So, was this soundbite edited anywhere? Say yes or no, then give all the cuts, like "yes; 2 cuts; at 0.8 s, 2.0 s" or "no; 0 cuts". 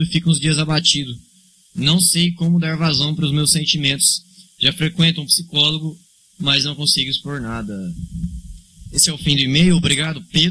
no; 0 cuts